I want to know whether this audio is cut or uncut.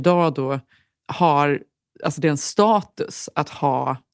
uncut